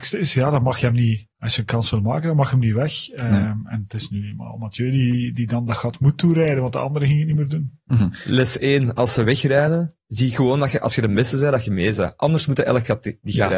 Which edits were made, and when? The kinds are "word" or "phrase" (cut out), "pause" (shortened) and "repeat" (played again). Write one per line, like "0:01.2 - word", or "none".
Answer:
0:01.3 - pause